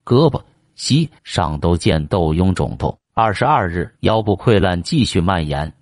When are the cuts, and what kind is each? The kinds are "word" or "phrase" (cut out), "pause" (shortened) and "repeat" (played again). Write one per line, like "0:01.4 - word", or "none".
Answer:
0:01.2 - pause
0:03.0 - pause
0:04.0 - pause